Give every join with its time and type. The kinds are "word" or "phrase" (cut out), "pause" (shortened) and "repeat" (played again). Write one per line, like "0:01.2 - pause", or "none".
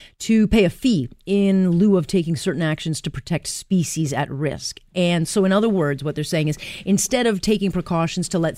none